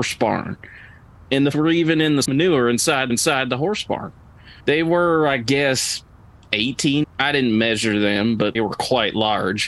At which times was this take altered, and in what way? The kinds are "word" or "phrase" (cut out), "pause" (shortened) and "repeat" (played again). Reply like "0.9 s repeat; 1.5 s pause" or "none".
1.5 s word; 2.2 s word; 3.1 s repeat; 4.6 s pause; 7.0 s word; 8.5 s word